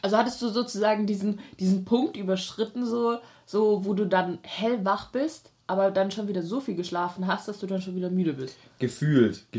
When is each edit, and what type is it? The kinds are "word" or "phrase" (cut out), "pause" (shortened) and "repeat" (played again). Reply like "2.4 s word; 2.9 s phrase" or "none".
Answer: none